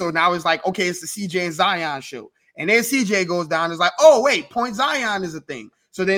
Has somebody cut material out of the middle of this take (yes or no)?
no